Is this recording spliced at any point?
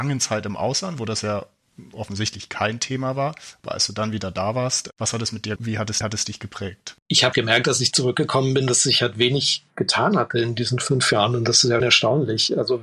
yes; 6 cuts; at 1.9 s, 5.6 s, 6.0 s, 7.0 s, 7.3 s, 11.8 s

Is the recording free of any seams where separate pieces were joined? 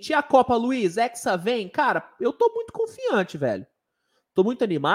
yes; 0 cuts

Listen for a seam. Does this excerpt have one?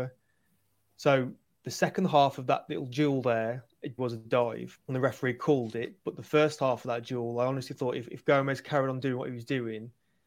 yes; 2 cuts; at 4.0 s, 4.8 s

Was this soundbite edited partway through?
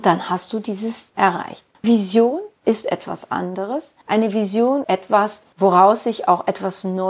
yes; 4 cuts; at 1.1 s, 1.8 s, 2.8 s, 4.8 s

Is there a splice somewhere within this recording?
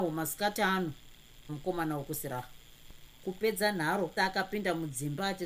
yes; 2 cuts; at 1.5 s, 4.2 s

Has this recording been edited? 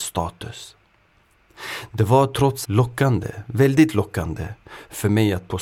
yes; 1 cut; at 2.6 s

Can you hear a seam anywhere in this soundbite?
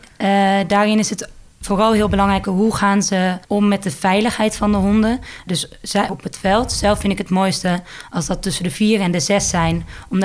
yes; 5 cuts; at 1.5 s, 2.4 s, 3.4 s, 5.5 s, 6.1 s

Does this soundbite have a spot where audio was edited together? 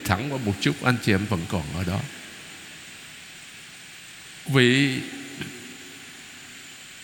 yes; 2 cuts; at 1.3 s, 4.5 s

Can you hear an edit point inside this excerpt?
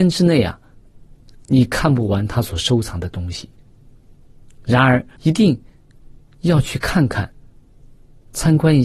yes; 1 cut; at 5.2 s

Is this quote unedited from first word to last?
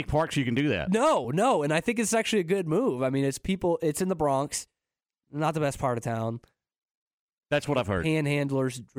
yes; 0 cuts

